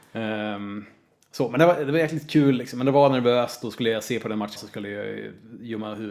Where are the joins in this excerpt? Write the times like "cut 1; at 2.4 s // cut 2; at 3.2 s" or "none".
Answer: cut 1; at 4.6 s

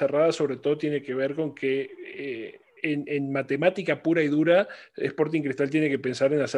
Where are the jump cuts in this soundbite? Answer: cut 1; at 2.8 s

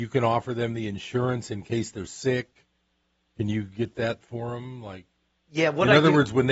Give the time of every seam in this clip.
none

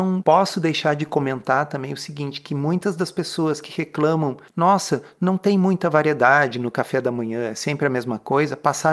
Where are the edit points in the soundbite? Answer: cut 1; at 4.5 s

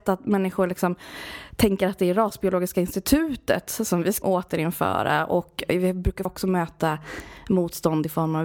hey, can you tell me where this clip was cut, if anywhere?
cut 1; at 4.2 s // cut 2; at 6.2 s

